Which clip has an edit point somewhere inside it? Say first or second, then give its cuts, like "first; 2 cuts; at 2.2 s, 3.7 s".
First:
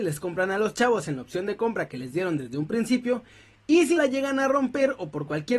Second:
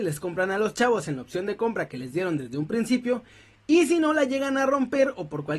first; 1 cut; at 4.0 s